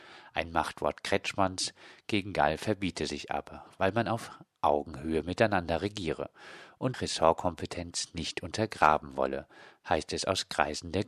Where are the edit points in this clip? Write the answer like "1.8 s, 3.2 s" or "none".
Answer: 6.9 s